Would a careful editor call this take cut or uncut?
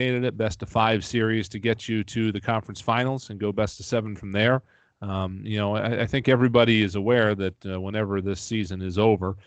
uncut